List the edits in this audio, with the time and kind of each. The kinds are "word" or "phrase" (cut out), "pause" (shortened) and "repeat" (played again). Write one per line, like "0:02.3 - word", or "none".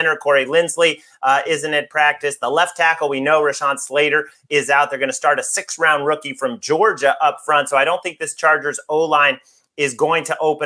none